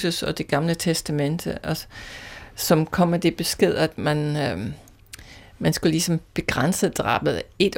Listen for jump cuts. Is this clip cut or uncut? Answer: uncut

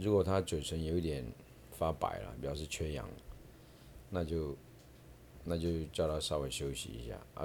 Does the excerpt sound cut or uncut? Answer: uncut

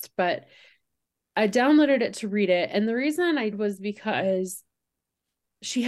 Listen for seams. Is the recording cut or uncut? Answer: cut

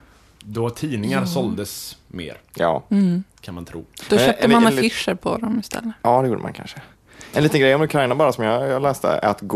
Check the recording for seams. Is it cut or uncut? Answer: uncut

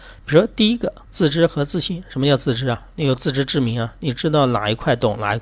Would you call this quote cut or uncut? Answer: cut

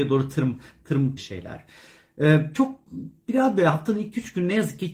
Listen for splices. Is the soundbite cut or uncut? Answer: cut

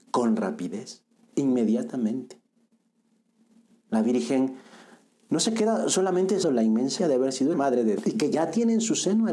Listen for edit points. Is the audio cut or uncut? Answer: cut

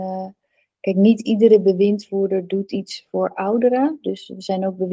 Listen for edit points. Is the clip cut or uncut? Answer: uncut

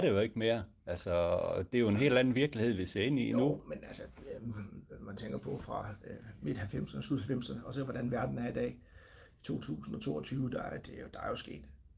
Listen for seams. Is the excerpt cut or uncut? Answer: uncut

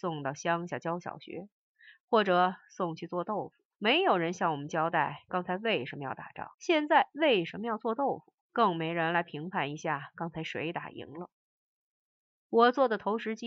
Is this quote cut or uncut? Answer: cut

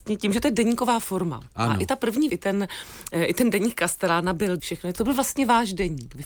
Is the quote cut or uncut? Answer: cut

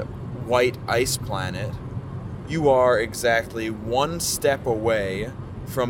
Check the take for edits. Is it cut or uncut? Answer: cut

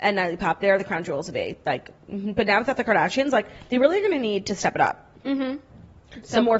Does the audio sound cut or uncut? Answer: uncut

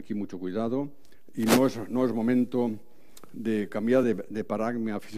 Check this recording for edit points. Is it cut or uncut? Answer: uncut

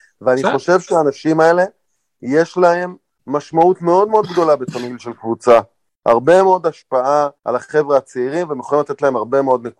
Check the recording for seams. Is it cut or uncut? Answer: cut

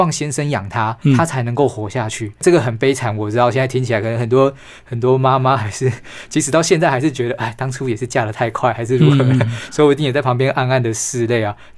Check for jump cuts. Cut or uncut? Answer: uncut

